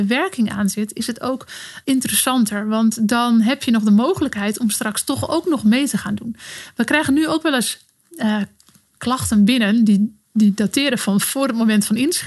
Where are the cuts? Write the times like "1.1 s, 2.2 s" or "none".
1.8 s